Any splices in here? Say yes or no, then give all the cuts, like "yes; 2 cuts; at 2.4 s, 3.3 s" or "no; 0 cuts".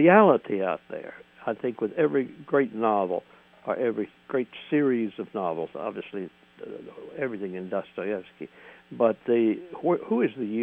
no; 0 cuts